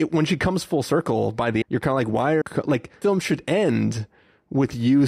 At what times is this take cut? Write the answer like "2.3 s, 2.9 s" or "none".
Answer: 1.6 s, 2.4 s, 3.0 s

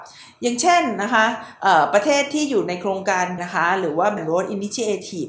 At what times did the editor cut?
3.4 s, 4.2 s

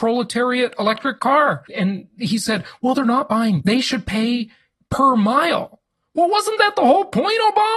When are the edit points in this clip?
1.7 s, 2.9 s, 3.6 s

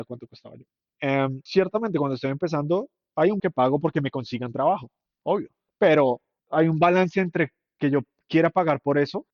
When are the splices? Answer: 1.5 s, 3.4 s

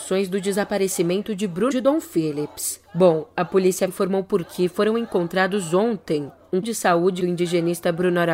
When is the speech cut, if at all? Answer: 1.7 s, 3.9 s, 4.4 s, 6.6 s, 7.2 s

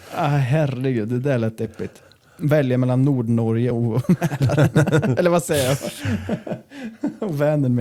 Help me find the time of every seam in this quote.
none

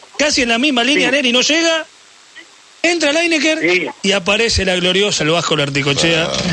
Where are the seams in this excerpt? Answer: 5.2 s

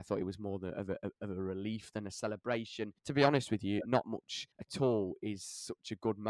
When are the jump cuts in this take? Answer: 3.0 s, 4.5 s

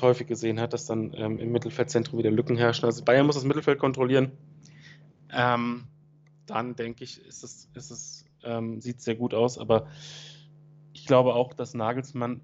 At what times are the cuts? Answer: none

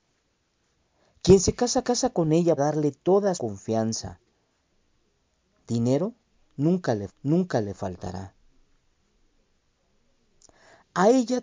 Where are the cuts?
1.8 s, 2.6 s, 3.3 s, 7.1 s

